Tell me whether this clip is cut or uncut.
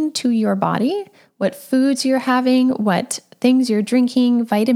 uncut